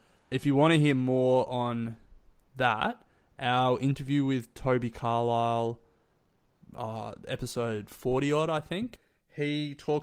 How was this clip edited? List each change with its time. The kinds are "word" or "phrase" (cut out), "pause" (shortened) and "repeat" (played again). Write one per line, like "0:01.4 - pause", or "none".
none

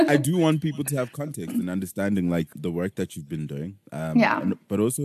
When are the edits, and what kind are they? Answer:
0:02.5 - word
0:03.9 - pause

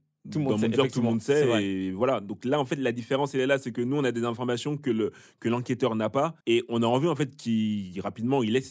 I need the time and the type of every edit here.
0:06.4 - pause

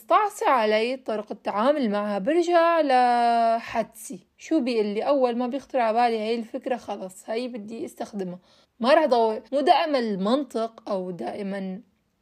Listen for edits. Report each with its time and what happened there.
0:08.6 - pause
0:09.5 - pause

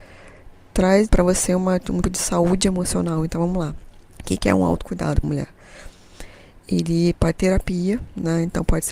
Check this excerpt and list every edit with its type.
0:01.1 - word
0:02.0 - word
0:04.1 - pause
0:05.2 - word
0:07.3 - phrase

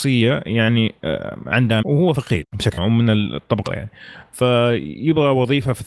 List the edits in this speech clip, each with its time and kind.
0:01.8 - phrase
0:02.4 - word
0:02.8 - word
0:03.7 - word

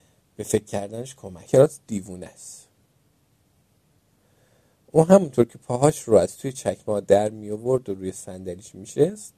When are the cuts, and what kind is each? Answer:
0:01.4 - phrase

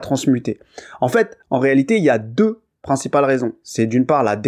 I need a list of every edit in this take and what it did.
0:01.4 - pause

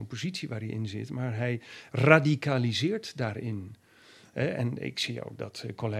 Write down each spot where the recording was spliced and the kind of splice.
none

